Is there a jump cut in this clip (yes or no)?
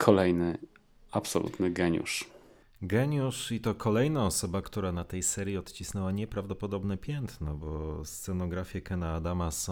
no